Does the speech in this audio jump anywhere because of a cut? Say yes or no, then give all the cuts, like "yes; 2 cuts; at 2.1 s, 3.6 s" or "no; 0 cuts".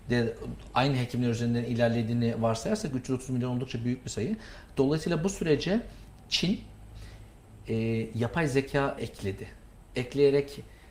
yes; 1 cut; at 9.0 s